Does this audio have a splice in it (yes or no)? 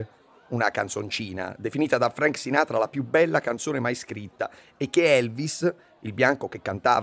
no